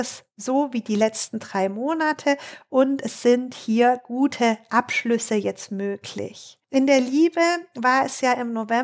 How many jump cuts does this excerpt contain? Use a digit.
1